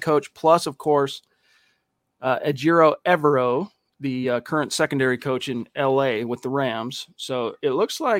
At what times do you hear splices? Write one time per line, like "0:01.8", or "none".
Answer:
none